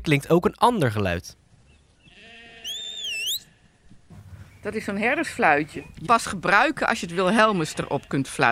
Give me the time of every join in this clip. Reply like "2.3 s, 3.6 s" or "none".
6.1 s